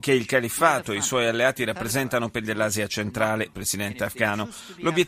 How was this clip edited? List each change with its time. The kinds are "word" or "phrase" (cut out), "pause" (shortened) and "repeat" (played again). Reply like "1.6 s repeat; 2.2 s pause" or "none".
2.4 s word; 3.5 s phrase